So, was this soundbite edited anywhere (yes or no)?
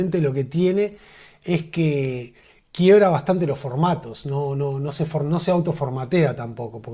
no